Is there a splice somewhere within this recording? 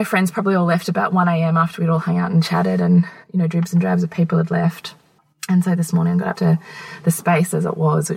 yes; 3 cuts; at 3.2 s, 5.2 s, 6.3 s

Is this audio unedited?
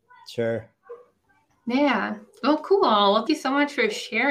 no; 1 cut; at 3.3 s

